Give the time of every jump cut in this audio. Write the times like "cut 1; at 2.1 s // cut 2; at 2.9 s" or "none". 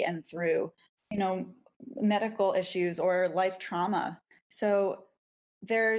none

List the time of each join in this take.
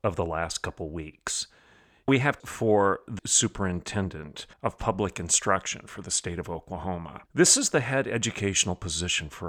cut 1; at 2.1 s // cut 2; at 2.4 s // cut 3; at 3.2 s // cut 4; at 4.5 s // cut 5; at 7.3 s

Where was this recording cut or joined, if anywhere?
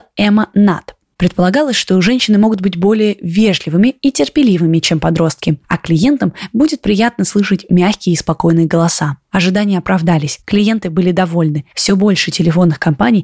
none

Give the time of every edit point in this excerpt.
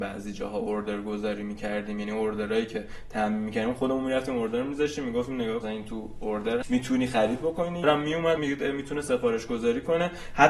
cut 1; at 5.6 s // cut 2; at 6.6 s // cut 3; at 7.8 s // cut 4; at 8.4 s

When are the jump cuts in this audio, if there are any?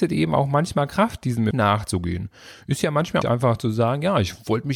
cut 1; at 1.5 s // cut 2; at 3.2 s

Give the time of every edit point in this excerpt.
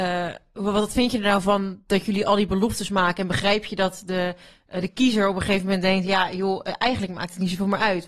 none

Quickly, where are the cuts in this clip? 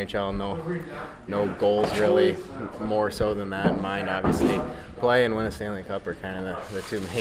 none

